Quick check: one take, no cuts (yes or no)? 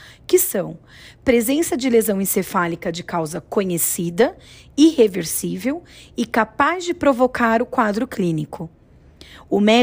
yes